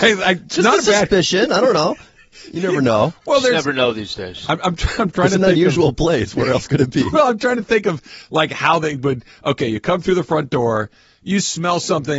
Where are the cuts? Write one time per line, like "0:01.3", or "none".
none